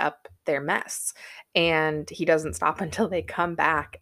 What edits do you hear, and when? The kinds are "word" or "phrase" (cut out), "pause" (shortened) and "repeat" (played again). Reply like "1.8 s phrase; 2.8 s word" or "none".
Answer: none